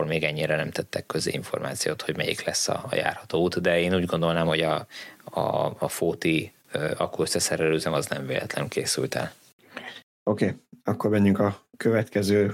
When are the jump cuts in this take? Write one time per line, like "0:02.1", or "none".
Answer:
none